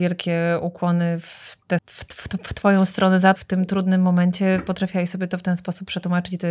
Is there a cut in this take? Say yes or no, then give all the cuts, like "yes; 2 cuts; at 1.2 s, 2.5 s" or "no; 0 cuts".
yes; 2 cuts; at 1.8 s, 3.4 s